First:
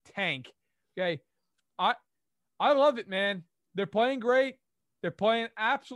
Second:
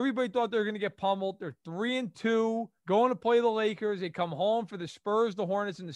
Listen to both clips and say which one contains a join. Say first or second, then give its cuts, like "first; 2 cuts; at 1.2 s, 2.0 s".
second; 1 cut; at 2.8 s